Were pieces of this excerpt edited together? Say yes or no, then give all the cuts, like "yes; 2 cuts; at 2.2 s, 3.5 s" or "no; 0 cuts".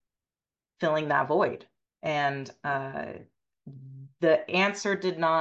yes; 1 cut; at 1.9 s